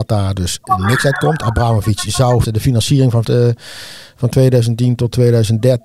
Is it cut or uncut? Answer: cut